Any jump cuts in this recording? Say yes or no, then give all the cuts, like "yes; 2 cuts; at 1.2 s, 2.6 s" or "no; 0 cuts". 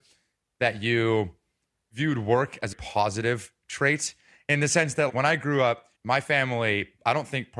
yes; 3 cuts; at 2.7 s, 5.1 s, 5.9 s